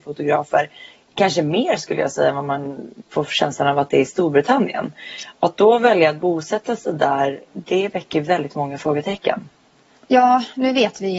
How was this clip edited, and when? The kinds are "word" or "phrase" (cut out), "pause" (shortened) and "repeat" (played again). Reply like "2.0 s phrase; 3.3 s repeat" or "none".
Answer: none